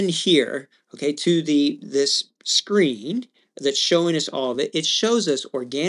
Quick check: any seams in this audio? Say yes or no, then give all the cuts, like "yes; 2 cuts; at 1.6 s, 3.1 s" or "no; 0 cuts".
no; 0 cuts